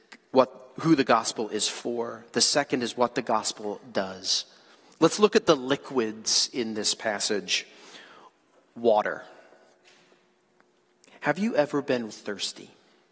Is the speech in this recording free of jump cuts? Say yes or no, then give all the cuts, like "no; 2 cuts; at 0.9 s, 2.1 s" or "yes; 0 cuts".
no; 1 cut; at 12.1 s